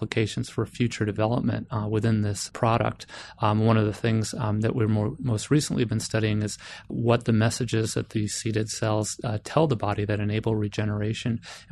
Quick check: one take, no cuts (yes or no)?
yes